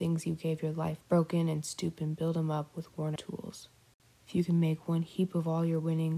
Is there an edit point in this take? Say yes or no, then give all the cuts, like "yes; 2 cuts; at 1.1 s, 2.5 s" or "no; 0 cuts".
yes; 2 cuts; at 1.0 s, 3.2 s